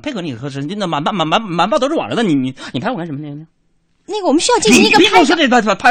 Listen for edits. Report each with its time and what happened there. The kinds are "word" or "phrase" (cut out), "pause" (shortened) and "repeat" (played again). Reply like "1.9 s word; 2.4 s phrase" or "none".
none